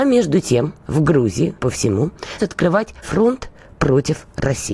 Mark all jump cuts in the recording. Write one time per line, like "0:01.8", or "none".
0:01.6
0:02.4
0:03.0